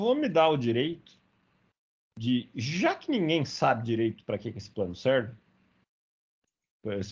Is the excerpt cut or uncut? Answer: uncut